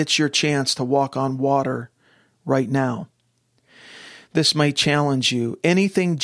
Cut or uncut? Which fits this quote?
uncut